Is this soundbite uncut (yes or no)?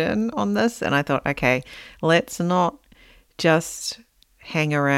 yes